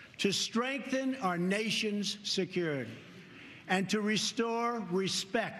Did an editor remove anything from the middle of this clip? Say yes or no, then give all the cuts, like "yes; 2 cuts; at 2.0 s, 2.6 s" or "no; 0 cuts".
no; 0 cuts